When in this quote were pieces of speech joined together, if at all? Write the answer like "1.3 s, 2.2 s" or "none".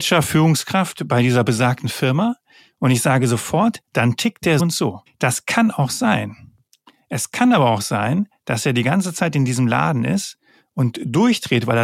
4.6 s, 5.1 s

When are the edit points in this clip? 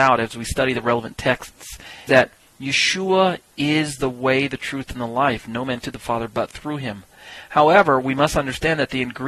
2.1 s, 5.8 s

